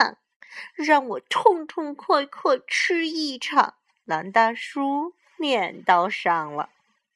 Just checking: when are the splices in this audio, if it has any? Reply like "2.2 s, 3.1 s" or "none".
none